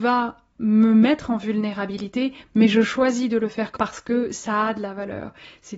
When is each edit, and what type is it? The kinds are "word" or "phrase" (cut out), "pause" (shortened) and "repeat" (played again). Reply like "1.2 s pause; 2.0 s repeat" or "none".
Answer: 3.8 s word